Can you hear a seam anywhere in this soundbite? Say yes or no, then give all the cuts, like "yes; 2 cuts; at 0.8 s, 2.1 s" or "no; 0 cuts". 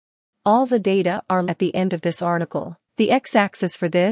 yes; 2 cuts; at 1.4 s, 2.9 s